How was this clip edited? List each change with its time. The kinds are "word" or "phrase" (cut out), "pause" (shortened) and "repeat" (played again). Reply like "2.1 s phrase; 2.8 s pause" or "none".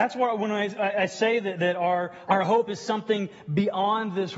2.3 s word